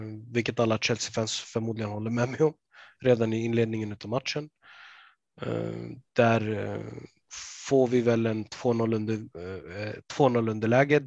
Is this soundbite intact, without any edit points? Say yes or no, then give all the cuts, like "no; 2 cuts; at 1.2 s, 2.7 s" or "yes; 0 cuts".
yes; 0 cuts